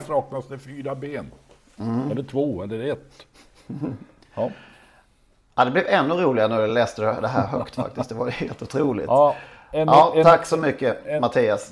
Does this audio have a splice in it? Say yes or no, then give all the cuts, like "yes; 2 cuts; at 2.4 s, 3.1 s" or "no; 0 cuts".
no; 0 cuts